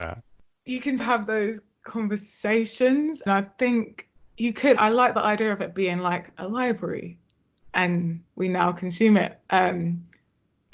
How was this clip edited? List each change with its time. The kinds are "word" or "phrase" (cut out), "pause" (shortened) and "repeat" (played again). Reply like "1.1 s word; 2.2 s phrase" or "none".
1.0 s word; 3.3 s word; 4.2 s pause; 4.8 s word; 8.3 s pause

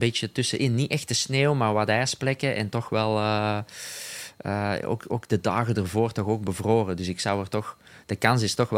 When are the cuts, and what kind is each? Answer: none

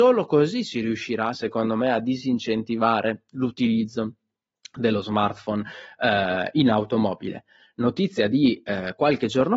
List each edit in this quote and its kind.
none

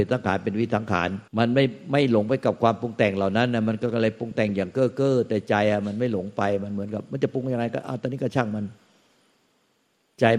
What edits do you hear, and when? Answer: 1.3 s pause

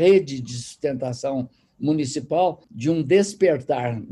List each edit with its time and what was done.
none

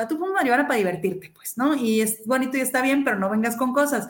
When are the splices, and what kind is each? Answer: none

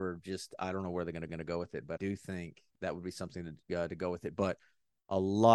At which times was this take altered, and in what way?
1.3 s repeat; 2.0 s word

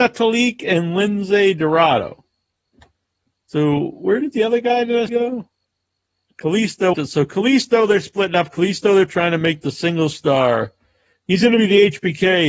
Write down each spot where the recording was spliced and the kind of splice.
5.1 s word; 6.9 s word

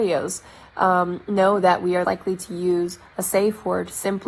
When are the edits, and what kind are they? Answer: 2.0 s word

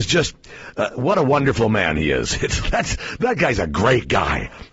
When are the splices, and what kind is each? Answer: 2.6 s word

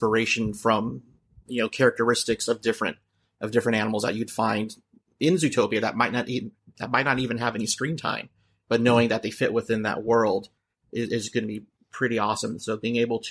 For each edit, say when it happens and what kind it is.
none

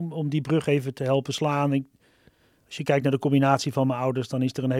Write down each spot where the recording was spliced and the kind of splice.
none

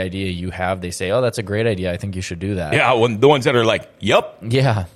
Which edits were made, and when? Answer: none

